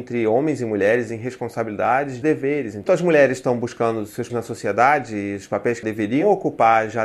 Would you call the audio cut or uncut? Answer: cut